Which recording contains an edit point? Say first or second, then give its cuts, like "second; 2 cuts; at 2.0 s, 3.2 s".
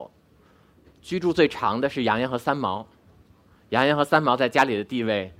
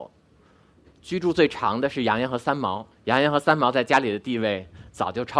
second; 1 cut; at 2.9 s